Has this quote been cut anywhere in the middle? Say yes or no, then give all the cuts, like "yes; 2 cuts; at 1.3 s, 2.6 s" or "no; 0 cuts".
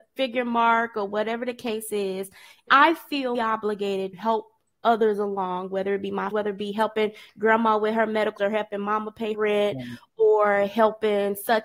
yes; 6 cuts; at 2.7 s, 3.3 s, 4.1 s, 6.3 s, 8.4 s, 9.3 s